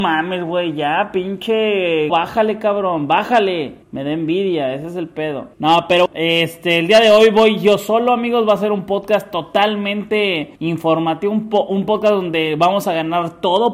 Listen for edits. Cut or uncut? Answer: cut